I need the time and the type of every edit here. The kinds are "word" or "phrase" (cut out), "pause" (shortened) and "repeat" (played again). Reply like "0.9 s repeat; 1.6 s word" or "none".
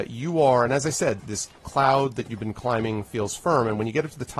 1.2 s word